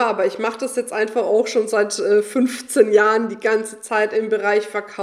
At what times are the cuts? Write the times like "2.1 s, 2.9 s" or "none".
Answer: none

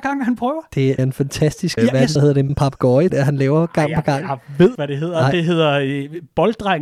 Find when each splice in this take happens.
1.0 s, 1.8 s, 2.2 s, 2.5 s, 3.1 s, 4.7 s

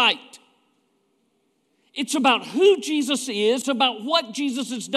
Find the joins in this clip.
3.6 s

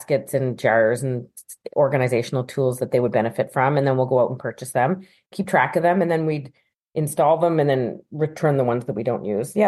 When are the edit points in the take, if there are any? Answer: none

